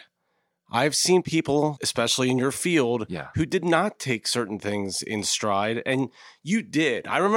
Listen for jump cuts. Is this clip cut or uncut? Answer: uncut